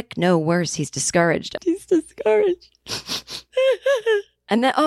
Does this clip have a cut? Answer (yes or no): yes